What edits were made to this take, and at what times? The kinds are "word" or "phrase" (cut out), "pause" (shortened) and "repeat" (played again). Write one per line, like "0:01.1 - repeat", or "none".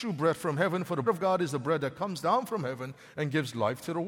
0:01.0 - word